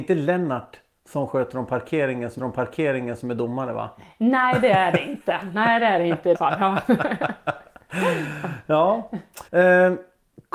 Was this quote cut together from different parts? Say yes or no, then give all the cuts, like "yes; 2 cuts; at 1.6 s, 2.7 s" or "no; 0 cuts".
yes; 3 cuts; at 2.4 s, 6.3 s, 9.5 s